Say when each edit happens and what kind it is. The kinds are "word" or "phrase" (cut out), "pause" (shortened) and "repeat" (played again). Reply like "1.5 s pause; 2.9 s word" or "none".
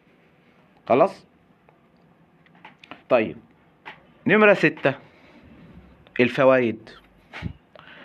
none